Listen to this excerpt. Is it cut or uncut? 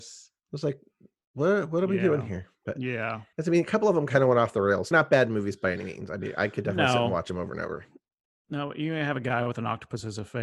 cut